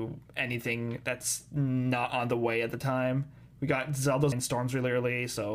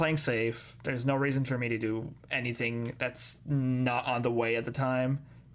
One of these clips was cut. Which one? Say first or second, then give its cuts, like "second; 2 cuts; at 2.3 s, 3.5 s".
first; 1 cut; at 4.3 s